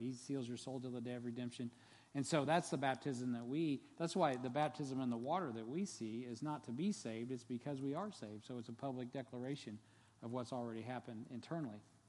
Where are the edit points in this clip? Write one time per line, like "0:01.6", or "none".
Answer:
none